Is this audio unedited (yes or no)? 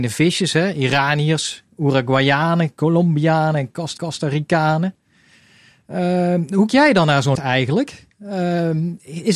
no